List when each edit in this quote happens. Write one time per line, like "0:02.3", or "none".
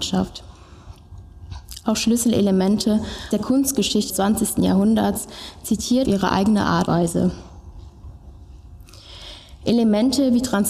0:03.3
0:04.1
0:06.0
0:06.9